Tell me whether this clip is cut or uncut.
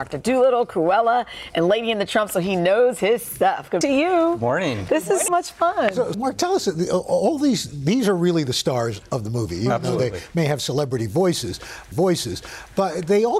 cut